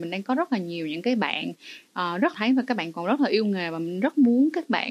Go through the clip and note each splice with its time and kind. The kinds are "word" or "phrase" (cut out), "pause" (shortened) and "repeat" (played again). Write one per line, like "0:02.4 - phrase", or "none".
0:02.3 - phrase